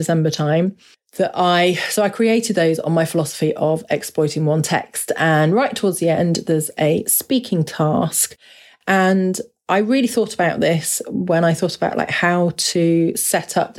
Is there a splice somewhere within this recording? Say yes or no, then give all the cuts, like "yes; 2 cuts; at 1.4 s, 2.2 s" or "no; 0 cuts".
no; 0 cuts